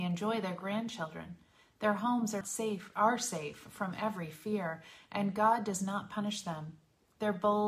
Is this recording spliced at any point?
yes; 1 cut; at 2.4 s

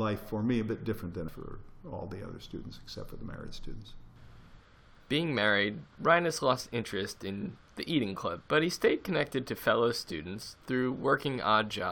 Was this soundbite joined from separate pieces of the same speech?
yes; 2 cuts; at 1.3 s, 8.4 s

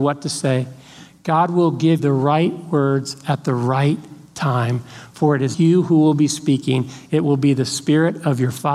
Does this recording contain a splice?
yes; 2 cuts; at 2.0 s, 5.5 s

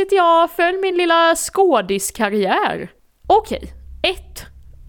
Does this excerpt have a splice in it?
no; 0 cuts

